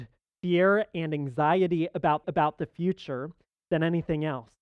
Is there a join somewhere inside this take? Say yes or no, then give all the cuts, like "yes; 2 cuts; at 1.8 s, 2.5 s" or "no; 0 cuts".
yes; 1 cut; at 2.2 s